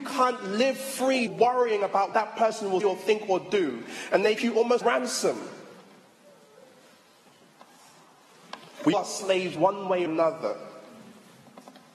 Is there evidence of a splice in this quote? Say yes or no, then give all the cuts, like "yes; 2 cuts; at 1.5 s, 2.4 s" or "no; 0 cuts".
yes; 8 cuts; at 1.3 s, 2.1 s, 2.8 s, 4.4 s, 4.8 s, 8.9 s, 9.5 s, 10.1 s